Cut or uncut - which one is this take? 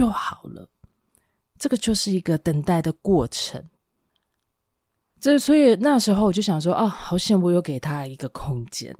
uncut